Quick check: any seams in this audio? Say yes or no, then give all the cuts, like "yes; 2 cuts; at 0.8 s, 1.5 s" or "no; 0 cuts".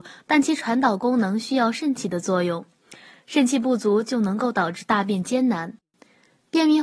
no; 0 cuts